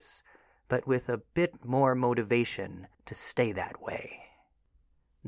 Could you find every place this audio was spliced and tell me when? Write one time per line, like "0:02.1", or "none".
0:02.9